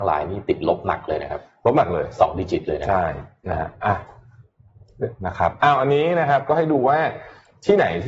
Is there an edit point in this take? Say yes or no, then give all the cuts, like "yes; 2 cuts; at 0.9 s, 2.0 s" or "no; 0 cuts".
yes; 1 cut; at 5.2 s